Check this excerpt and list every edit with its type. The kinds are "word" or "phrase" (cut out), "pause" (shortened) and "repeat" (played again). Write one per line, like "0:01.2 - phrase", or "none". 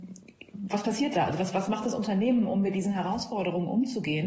none